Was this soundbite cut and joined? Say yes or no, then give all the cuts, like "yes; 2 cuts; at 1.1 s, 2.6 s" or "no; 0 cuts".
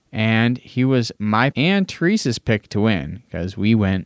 yes; 1 cut; at 1.5 s